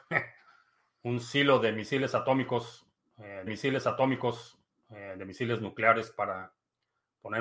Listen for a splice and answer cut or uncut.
cut